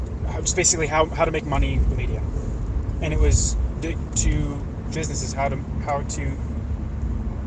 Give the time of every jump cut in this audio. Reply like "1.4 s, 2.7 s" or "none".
1.9 s, 4.1 s, 4.9 s